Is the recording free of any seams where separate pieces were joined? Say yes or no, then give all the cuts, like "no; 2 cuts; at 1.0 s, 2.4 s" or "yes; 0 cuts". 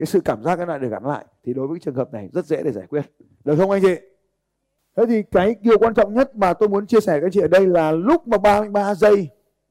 yes; 0 cuts